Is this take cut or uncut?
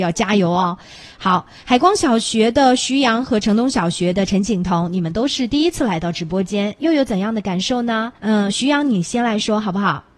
cut